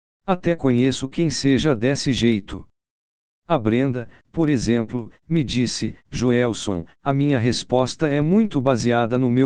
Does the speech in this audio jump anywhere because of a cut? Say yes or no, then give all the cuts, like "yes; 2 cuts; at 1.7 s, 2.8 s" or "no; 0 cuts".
no; 0 cuts